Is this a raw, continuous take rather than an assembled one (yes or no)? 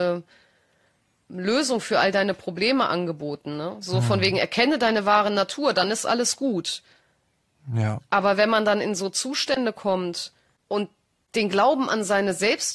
yes